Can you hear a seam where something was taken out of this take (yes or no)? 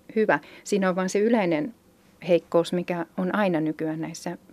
no